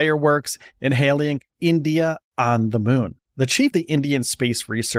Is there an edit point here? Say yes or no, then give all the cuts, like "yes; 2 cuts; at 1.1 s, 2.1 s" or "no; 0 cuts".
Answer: yes; 3 cuts; at 1.5 s, 3.2 s, 3.7 s